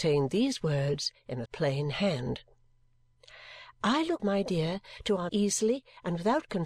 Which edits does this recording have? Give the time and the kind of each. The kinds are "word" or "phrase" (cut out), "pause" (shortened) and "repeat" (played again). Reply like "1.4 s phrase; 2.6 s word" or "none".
1.5 s word; 4.2 s word; 5.3 s word